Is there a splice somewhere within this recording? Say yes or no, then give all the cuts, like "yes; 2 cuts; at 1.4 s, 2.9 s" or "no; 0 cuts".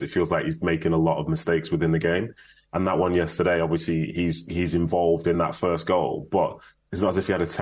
no; 0 cuts